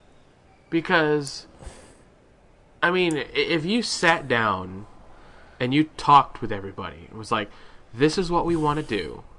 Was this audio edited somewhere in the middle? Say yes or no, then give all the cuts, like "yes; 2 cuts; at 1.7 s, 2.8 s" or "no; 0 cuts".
no; 0 cuts